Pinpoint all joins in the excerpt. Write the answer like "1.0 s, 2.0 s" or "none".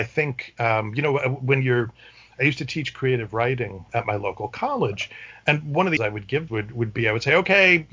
3.9 s, 6.0 s, 6.5 s